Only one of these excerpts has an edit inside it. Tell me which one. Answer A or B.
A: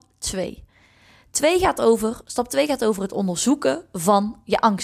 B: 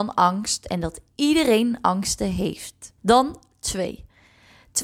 B